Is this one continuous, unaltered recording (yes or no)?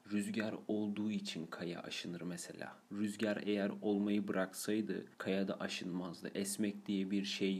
no